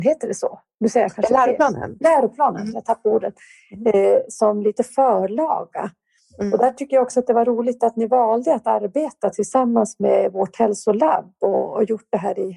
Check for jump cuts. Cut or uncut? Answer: uncut